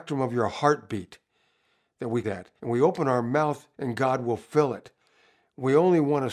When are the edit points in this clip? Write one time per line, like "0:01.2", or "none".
0:02.2
0:02.6
0:03.7